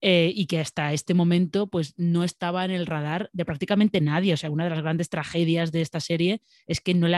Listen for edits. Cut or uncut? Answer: uncut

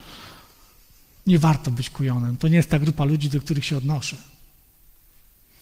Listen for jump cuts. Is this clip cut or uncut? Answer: uncut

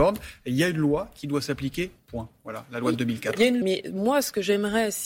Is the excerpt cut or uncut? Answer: cut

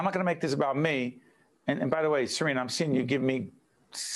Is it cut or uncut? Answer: uncut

